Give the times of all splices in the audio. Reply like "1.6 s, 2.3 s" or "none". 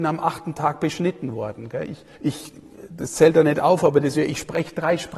2.1 s, 4.1 s